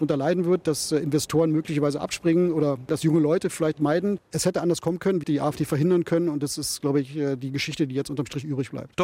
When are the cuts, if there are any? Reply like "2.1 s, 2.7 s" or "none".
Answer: 3.8 s, 5.2 s